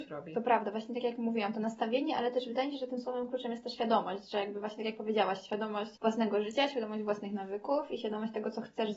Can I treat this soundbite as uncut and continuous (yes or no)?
no